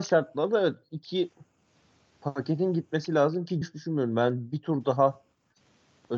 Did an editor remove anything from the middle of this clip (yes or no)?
yes